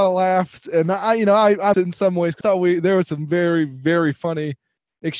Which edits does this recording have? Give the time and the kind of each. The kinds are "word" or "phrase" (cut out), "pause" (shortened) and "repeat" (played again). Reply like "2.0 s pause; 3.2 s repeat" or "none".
1.7 s word; 2.4 s word